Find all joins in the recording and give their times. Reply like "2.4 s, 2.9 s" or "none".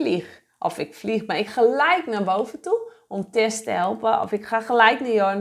1.5 s